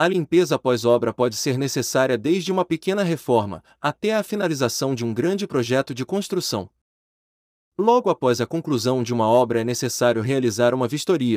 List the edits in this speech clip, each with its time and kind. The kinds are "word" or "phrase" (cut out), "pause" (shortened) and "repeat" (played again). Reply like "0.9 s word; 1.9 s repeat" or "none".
none